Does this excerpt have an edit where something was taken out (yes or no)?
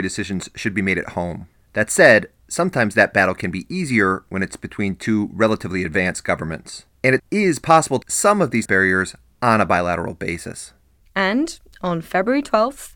yes